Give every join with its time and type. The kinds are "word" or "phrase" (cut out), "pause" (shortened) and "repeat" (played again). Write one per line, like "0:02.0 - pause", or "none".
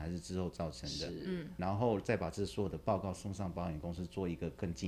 0:01.6 - word